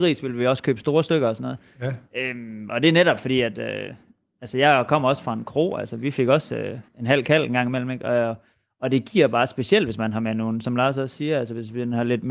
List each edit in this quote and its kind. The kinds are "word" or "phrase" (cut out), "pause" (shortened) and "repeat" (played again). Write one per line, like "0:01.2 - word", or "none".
0:06.9 - pause